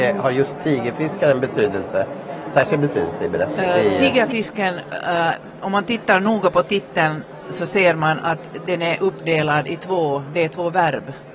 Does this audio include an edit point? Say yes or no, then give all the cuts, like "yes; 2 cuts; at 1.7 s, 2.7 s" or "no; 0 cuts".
no; 0 cuts